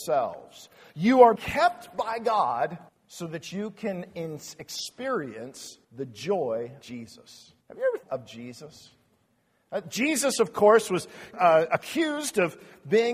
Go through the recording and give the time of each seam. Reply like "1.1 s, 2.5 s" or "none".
1.4 s, 2.9 s, 5.8 s, 6.8 s, 7.6 s, 8.0 s, 11.3 s